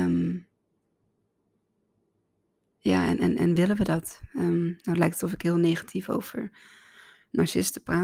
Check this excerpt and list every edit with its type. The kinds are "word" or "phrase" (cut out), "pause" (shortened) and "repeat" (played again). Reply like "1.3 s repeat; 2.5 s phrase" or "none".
none